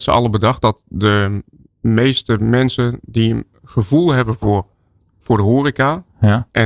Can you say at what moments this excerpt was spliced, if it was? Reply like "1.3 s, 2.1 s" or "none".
none